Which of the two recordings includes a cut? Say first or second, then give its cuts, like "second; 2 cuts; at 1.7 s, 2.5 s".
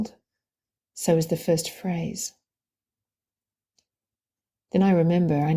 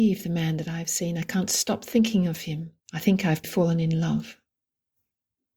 second; 2 cuts; at 2.8 s, 3.4 s